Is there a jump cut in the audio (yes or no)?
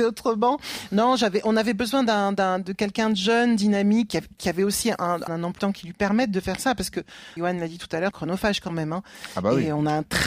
yes